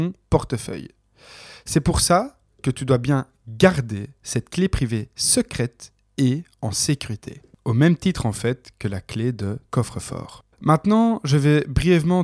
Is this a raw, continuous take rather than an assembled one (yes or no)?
no